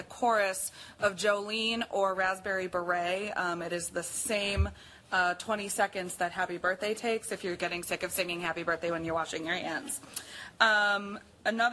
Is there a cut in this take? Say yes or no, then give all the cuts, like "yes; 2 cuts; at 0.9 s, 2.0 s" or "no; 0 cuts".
no; 0 cuts